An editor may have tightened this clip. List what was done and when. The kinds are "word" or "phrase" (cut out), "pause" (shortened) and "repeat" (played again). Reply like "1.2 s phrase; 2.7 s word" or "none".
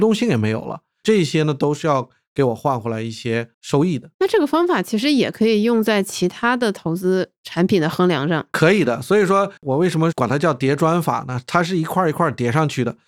4.1 s pause; 9.6 s pause